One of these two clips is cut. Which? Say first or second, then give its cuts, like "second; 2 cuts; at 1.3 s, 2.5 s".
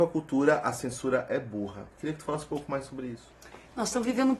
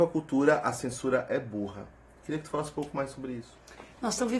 first; 1 cut; at 1.9 s